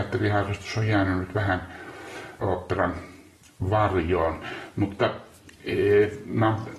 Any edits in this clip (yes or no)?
yes